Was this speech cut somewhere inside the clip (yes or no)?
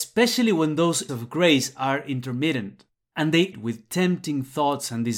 yes